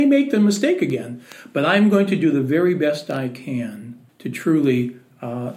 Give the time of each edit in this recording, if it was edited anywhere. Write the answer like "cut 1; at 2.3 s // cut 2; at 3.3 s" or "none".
cut 1; at 4.1 s